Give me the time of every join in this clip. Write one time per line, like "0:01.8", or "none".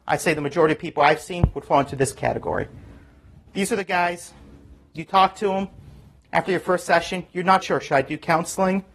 0:07.6